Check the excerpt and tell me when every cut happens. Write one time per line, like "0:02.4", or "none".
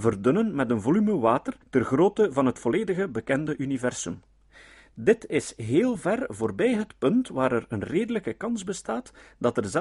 0:01.6